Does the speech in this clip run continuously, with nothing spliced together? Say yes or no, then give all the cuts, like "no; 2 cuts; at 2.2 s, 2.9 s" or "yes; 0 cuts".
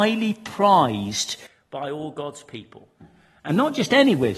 yes; 0 cuts